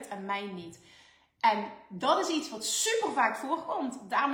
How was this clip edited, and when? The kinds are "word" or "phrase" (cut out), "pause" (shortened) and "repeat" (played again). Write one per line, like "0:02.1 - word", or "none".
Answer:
none